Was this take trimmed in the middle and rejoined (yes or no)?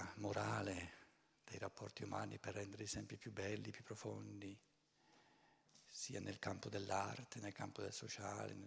no